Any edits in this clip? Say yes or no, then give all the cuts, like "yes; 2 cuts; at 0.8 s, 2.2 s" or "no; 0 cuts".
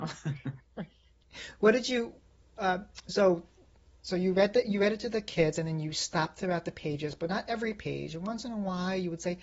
no; 0 cuts